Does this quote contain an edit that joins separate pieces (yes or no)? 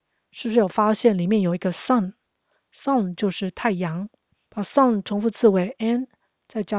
no